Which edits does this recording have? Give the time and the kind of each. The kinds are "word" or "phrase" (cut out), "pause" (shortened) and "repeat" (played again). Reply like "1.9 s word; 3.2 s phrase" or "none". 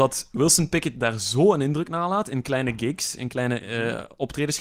none